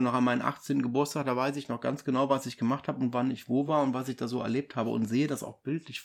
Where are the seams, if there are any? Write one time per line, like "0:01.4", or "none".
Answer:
none